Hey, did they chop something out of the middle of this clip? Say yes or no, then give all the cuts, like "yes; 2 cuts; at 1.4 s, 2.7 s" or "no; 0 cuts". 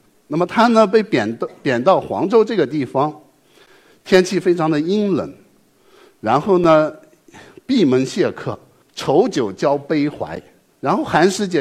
no; 0 cuts